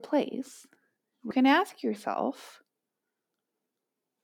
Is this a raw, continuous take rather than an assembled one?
no; 1 cut; at 1.3 s

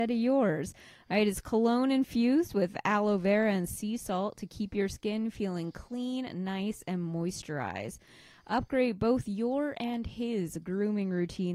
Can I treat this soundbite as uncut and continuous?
yes; 0 cuts

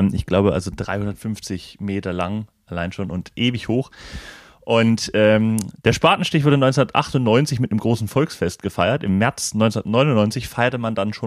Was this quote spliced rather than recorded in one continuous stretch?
no; 0 cuts

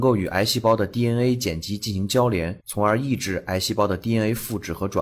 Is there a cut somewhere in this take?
yes; 1 cut; at 2.6 s

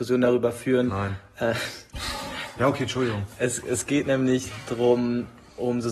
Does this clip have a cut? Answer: no; 0 cuts

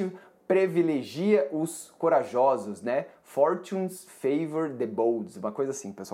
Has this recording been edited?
no; 0 cuts

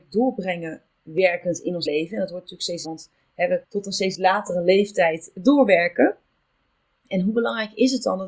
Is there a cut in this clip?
yes; 3 cuts; at 1.9 s, 2.8 s, 3.6 s

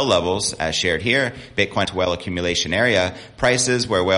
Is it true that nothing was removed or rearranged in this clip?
no; 1 cut; at 1.8 s

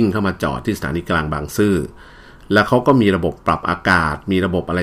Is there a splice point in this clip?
no; 0 cuts

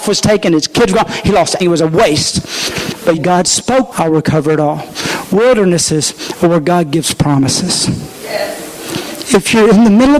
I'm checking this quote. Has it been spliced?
yes; 3 cuts; at 1.6 s, 3.2 s, 3.9 s

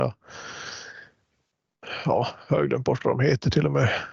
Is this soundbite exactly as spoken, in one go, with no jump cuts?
yes; 0 cuts

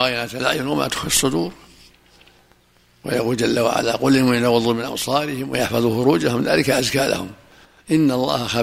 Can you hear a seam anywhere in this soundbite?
no; 0 cuts

